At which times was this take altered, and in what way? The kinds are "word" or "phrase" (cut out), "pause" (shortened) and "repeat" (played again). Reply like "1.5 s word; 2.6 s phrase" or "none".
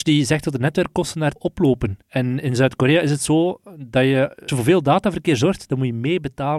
1.4 s word; 2.0 s pause; 4.5 s phrase